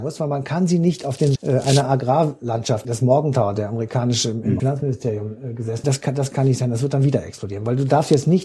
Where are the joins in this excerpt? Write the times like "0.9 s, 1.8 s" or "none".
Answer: 1.4 s, 2.8 s, 4.6 s, 5.8 s